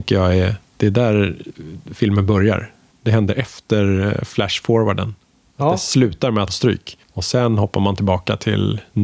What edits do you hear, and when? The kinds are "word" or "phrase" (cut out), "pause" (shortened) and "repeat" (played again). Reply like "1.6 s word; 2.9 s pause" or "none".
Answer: 6.5 s word; 7.0 s pause